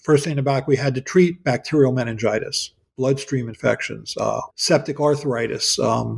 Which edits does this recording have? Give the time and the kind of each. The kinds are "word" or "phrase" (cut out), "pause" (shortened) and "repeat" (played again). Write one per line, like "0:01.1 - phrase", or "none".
0:04.5 - word